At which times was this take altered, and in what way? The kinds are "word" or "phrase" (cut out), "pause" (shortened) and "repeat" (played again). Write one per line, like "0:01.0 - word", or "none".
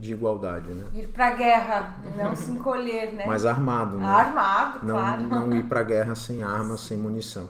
none